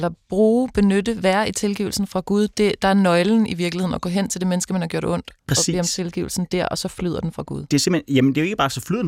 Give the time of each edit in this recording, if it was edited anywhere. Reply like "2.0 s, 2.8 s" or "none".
5.4 s

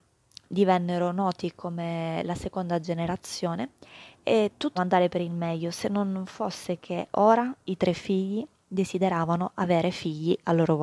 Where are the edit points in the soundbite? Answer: 4.8 s

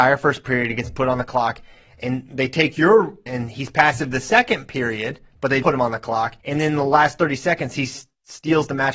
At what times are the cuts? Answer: 3.3 s, 5.6 s, 6.4 s

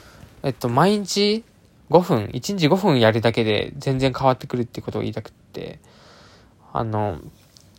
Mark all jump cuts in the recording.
none

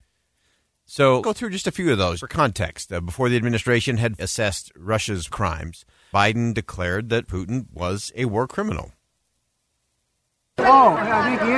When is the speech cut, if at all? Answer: 1.2 s, 2.2 s, 4.2 s, 5.3 s, 6.1 s, 7.3 s

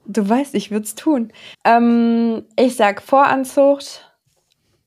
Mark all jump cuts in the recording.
1.5 s

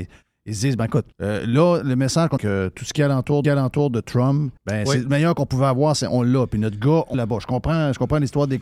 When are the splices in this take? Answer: 1.1 s, 2.4 s, 3.4 s, 4.6 s, 7.1 s

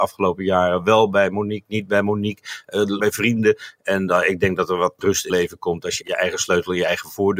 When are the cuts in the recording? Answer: 3.0 s, 5.0 s, 5.3 s, 6.0 s

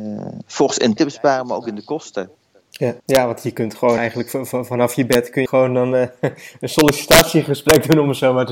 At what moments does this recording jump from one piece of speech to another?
1.0 s, 3.0 s, 4.0 s, 5.5 s

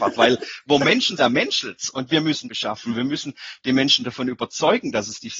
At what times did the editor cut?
1.2 s, 2.4 s

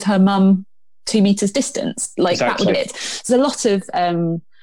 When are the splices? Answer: 2.7 s, 3.3 s

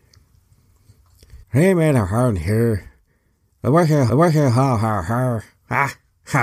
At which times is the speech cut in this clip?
1.4 s, 4.1 s

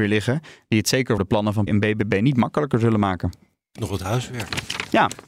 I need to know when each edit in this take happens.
1.2 s, 1.7 s, 3.8 s

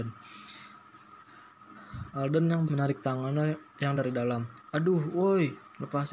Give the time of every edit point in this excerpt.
2.7 s, 4.0 s, 4.7 s

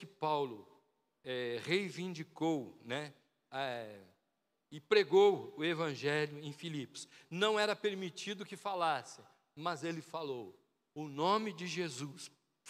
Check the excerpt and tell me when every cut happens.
none

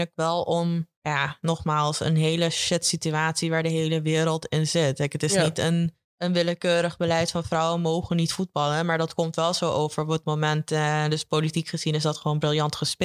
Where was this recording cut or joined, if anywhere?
1.0 s, 6.0 s

